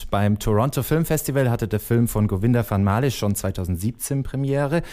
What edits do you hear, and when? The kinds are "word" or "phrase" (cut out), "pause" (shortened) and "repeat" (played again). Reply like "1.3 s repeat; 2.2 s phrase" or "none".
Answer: none